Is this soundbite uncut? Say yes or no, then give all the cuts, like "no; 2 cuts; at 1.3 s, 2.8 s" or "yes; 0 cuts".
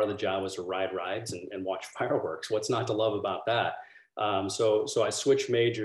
yes; 0 cuts